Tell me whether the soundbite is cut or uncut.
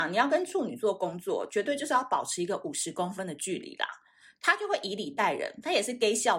uncut